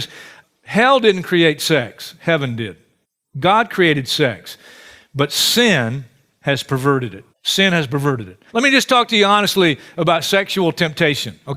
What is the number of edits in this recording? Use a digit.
3